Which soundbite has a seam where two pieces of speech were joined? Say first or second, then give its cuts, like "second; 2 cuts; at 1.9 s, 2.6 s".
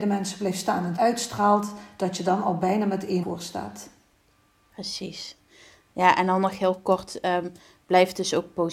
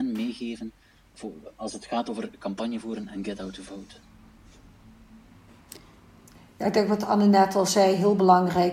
first; 2 cuts; at 1.0 s, 3.2 s